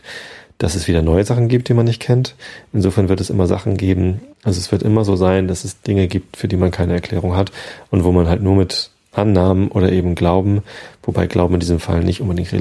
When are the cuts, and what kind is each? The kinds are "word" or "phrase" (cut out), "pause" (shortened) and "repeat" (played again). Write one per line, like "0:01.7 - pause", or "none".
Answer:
0:04.3 - pause

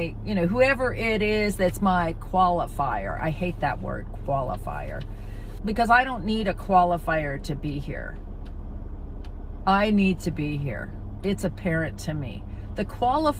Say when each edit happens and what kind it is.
0:05.6 - word

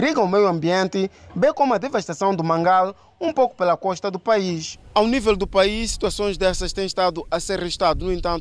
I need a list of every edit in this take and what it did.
none

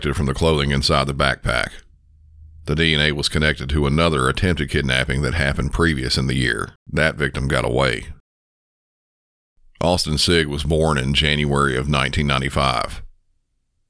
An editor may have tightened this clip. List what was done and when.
0:06.8 - pause

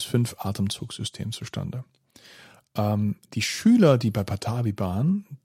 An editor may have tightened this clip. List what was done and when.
0:03.2 - pause

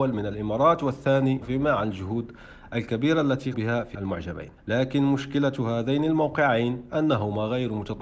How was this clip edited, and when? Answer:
0:01.4 - phrase
0:03.5 - word
0:03.9 - word
0:04.6 - pause

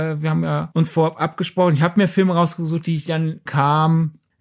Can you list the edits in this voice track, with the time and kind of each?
0:03.5 - phrase

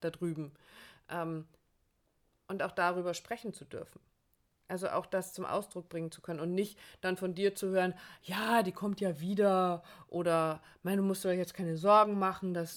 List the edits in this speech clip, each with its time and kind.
none

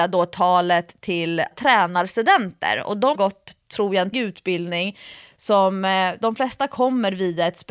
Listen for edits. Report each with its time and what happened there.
0:01.5 - word
0:03.2 - word
0:04.1 - word

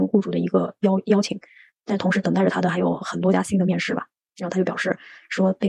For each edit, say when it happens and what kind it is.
none

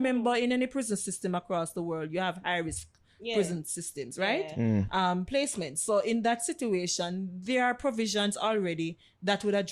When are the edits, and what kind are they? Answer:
none

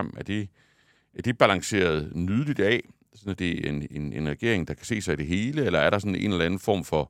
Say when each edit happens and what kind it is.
none

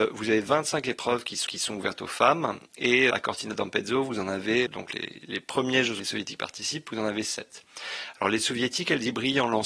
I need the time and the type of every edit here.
0:01.5 - repeat
0:03.1 - word
0:04.7 - word
0:06.0 - phrase

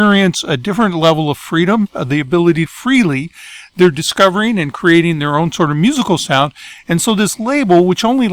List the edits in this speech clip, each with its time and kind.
0:02.7 - phrase

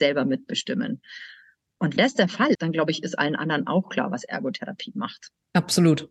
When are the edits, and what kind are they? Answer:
0:02.0 - word
0:02.5 - word

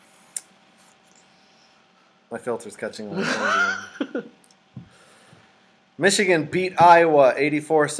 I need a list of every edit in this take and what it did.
none

